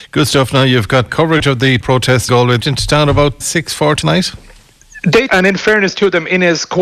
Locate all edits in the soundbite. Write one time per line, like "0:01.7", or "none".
0:01.1
0:01.8
0:02.3
0:02.6
0:03.4
0:04.0
0:05.3

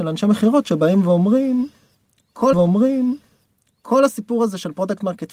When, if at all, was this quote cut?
0:02.5

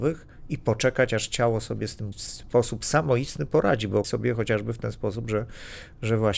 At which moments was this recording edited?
0:02.1
0:04.0

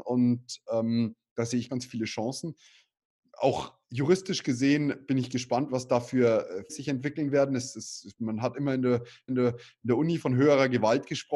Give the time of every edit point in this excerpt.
0:01.7
0:06.7
0:09.3

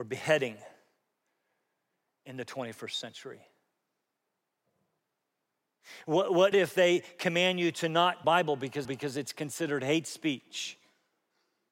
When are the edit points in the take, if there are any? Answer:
0:06.5
0:08.2
0:08.8

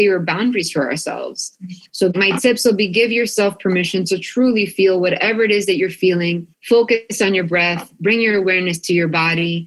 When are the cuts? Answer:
0:01.9
0:06.5

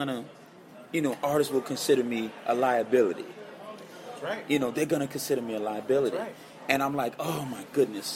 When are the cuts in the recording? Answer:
none

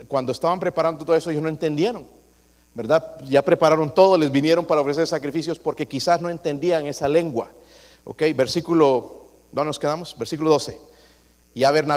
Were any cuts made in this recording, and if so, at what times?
none

